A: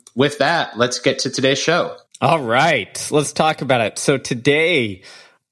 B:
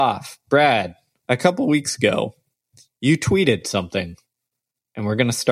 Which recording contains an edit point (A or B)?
A